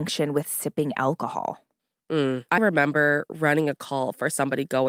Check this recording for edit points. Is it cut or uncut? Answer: cut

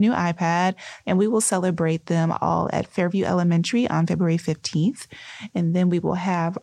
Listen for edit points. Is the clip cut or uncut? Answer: uncut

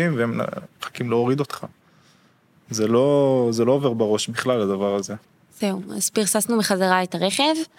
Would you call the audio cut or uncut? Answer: uncut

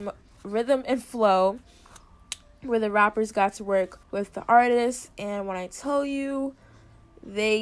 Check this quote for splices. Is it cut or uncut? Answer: cut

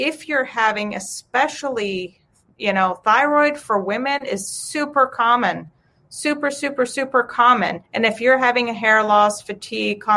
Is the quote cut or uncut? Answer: cut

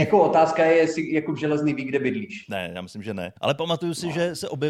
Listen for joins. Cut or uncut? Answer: cut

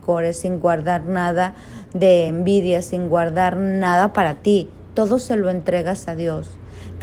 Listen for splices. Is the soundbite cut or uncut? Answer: uncut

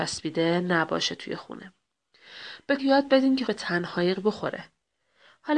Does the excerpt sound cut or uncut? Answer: cut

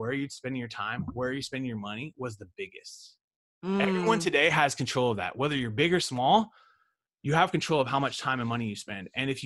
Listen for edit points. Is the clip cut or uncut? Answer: uncut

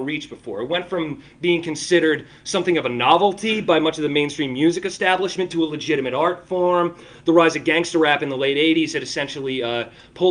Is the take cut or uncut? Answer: uncut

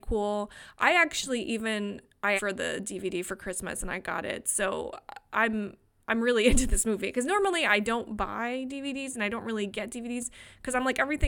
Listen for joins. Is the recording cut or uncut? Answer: cut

